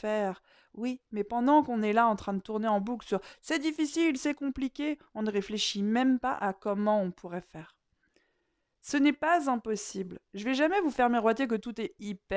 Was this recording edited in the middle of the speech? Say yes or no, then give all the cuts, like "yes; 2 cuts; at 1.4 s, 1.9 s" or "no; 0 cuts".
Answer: no; 0 cuts